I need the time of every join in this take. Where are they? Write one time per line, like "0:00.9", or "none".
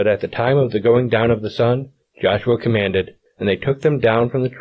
none